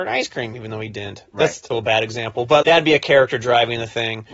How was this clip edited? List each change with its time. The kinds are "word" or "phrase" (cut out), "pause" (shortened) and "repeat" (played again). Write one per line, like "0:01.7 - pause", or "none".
0:01.7 - word
0:02.6 - word